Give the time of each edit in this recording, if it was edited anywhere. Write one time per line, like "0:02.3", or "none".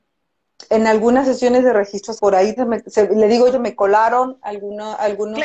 0:02.2
0:02.6
0:03.5

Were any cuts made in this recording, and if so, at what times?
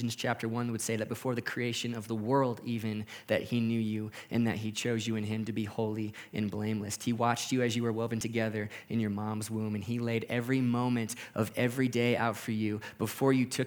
none

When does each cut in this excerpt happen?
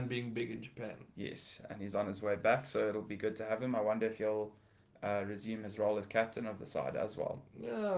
none

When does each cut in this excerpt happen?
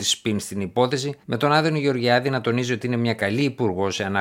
0:01.2

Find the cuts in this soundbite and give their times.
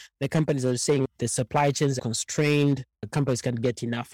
0:02.9

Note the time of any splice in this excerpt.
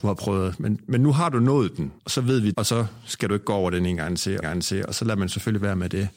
0:02.0
0:02.5
0:04.4

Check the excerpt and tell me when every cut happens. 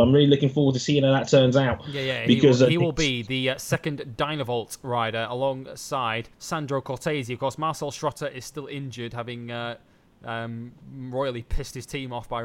0:06.3
0:10.8

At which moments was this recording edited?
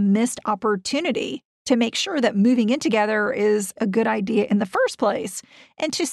0:03.8

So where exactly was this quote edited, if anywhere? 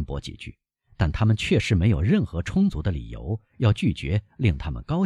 none

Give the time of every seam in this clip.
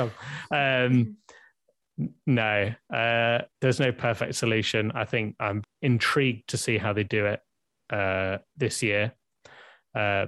0:03.5
0:05.6
0:08.5

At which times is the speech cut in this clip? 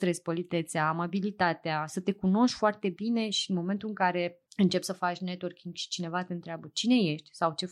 0:04.5

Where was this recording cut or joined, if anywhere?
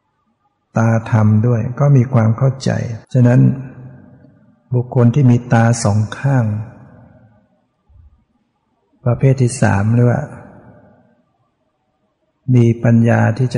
0:03.0

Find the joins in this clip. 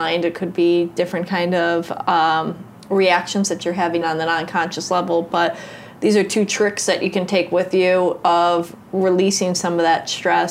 0:04.0

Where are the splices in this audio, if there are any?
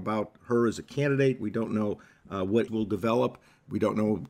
0:02.7

